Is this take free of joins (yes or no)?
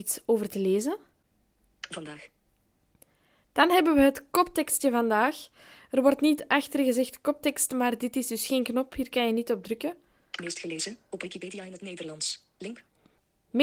yes